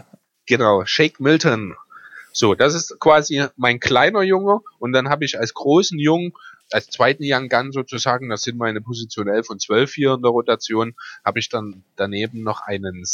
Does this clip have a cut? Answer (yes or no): yes